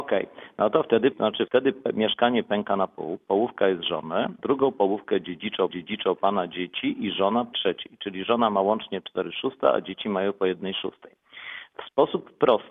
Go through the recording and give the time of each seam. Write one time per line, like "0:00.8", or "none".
0:01.1
0:01.5
0:04.4
0:05.7
0:07.5